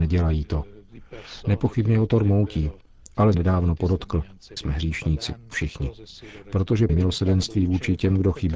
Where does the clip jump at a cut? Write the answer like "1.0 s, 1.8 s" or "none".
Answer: 3.3 s, 4.6 s, 5.5 s, 6.9 s